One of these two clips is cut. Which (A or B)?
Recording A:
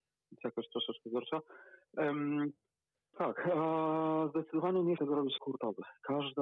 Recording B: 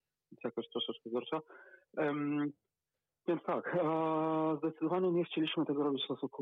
A